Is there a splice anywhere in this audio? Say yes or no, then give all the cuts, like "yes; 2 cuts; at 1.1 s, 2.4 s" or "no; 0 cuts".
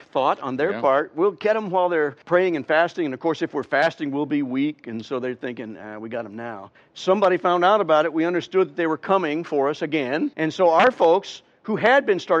yes; 3 cuts; at 2.2 s, 6.7 s, 10.3 s